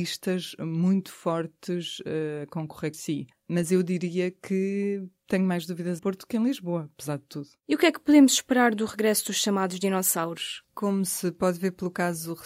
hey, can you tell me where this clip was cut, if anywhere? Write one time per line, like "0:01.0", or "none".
0:02.9
0:03.3
0:06.0